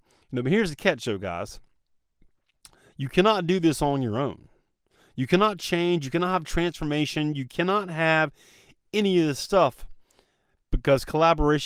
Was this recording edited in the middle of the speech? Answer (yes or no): no